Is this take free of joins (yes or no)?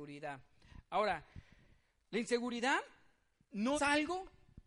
no